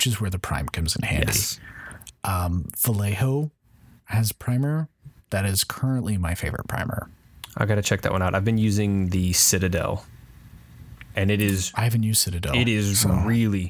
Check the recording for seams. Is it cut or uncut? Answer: uncut